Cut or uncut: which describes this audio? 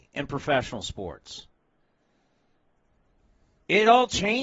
uncut